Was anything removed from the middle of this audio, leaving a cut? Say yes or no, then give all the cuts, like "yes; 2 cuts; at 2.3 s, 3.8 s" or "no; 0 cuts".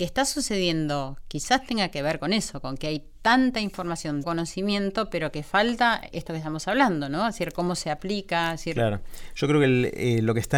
yes; 2 cuts; at 4.2 s, 6.1 s